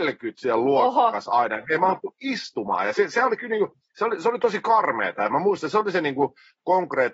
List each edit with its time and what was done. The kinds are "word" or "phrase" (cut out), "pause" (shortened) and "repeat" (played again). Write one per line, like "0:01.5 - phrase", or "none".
none